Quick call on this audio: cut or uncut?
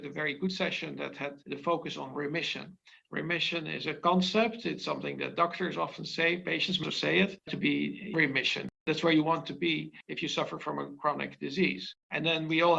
cut